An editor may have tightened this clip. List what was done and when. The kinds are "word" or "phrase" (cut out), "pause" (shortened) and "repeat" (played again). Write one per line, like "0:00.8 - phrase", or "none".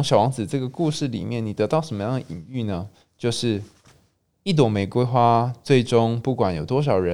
none